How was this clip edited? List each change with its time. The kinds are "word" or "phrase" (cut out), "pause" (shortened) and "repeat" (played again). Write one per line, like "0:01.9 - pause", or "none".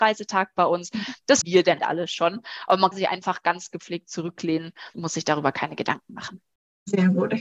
0:01.4 - word
0:01.8 - word
0:02.9 - word
0:04.9 - word